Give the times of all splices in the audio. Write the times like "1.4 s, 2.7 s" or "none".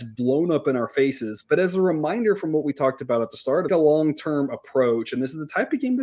3.7 s